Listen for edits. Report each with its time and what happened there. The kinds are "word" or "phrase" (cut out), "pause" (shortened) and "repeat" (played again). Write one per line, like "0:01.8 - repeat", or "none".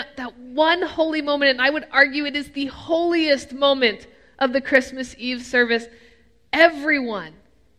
none